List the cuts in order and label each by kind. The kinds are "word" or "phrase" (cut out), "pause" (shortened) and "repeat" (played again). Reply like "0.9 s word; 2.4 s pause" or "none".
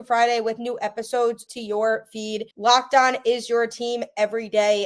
1.5 s word; 2.5 s pause